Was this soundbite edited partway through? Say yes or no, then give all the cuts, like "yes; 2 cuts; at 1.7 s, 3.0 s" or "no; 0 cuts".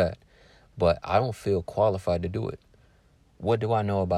no; 0 cuts